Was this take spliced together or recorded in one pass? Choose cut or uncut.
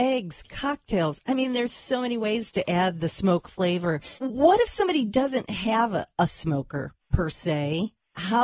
cut